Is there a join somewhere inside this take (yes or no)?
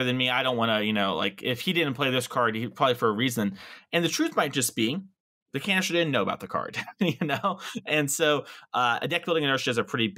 no